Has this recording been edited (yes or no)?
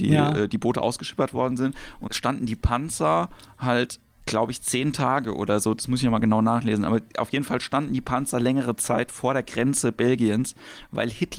yes